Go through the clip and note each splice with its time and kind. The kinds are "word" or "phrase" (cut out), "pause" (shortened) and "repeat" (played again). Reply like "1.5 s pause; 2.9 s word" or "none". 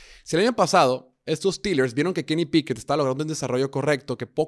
none